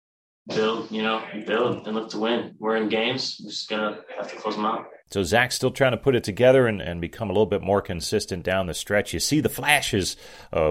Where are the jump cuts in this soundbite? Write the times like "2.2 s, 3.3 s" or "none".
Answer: 5.0 s